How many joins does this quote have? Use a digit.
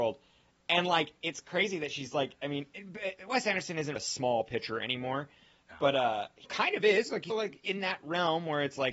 3